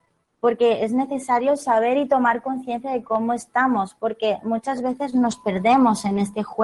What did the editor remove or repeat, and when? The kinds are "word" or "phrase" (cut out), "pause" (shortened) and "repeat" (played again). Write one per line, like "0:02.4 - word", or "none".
none